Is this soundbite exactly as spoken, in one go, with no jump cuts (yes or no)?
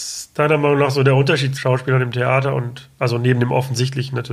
no